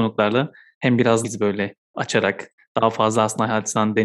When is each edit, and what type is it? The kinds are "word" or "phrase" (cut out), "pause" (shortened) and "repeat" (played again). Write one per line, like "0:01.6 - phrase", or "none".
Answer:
0:01.2 - word